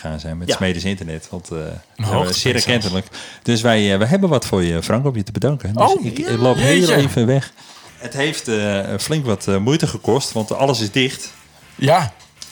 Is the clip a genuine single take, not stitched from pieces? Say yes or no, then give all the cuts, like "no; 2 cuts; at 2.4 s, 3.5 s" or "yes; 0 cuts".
yes; 0 cuts